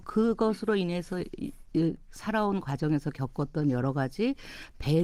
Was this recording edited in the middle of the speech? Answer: no; 0 cuts

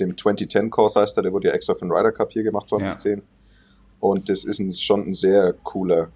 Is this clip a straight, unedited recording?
yes; 0 cuts

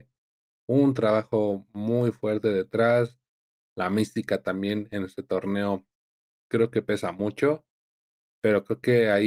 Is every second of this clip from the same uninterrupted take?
yes; 0 cuts

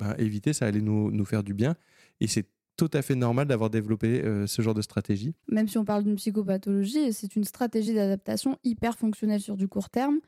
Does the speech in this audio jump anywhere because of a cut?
no; 0 cuts

